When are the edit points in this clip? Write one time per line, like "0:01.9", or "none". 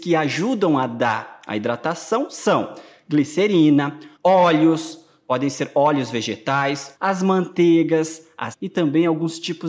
0:04.1
0:06.9
0:08.5